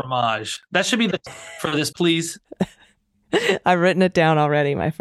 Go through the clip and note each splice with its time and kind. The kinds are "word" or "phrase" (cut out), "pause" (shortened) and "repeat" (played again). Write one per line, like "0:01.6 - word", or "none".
0:01.3 - word
0:01.9 - word